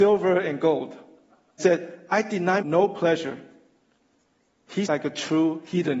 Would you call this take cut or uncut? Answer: cut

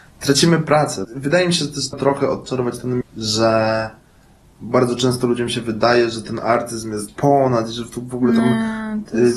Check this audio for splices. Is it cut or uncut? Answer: cut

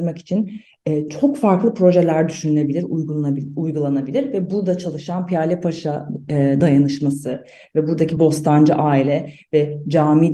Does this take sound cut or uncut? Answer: uncut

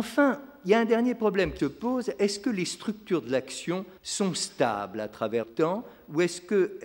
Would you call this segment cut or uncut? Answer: cut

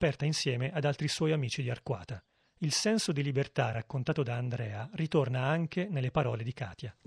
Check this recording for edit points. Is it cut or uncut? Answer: uncut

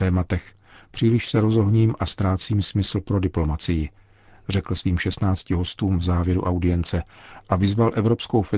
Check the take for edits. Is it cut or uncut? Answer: uncut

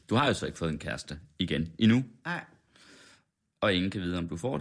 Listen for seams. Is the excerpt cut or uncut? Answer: uncut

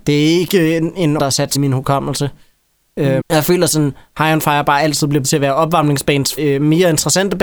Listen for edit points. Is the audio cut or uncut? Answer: cut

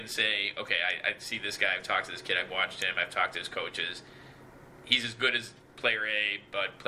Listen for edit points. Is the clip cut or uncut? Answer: uncut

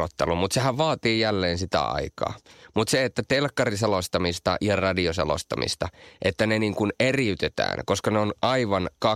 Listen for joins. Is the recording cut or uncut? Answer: uncut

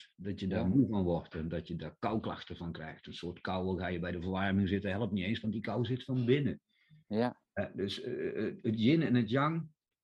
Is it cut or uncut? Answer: uncut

